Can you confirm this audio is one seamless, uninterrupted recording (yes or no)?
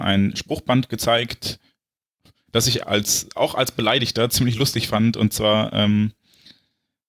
no